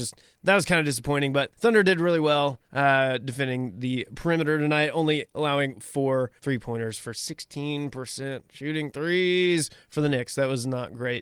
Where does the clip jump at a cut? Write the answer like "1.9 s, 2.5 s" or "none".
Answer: 1.5 s, 2.7 s, 6.4 s